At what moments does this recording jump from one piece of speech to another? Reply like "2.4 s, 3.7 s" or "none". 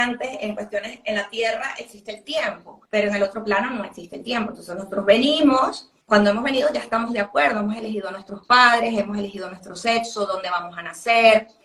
2.8 s, 6.0 s